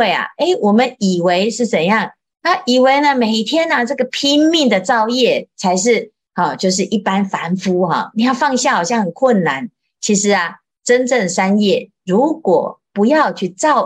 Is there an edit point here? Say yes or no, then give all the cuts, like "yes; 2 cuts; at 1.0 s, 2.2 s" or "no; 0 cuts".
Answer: no; 0 cuts